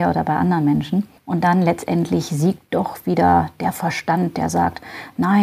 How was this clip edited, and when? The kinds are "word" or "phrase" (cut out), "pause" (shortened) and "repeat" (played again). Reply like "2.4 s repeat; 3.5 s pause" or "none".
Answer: 1.2 s pause